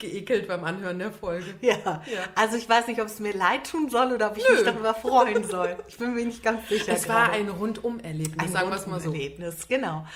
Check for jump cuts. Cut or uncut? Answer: uncut